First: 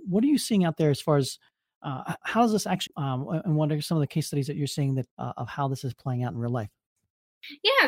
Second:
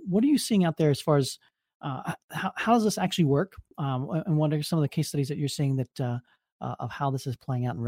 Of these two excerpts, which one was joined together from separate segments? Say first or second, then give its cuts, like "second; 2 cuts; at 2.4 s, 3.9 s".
first; 3 cuts; at 2.2 s, 2.9 s, 5.1 s